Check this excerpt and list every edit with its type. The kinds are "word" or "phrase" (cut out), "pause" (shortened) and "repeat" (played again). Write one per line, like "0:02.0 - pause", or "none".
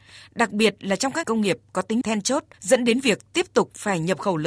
0:01.2 - word
0:02.0 - phrase
0:02.5 - pause